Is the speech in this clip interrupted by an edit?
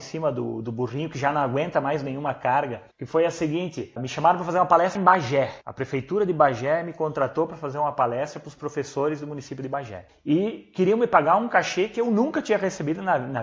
yes; 1 cut; at 5.0 s

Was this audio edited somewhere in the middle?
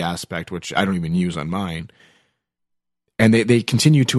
no; 0 cuts

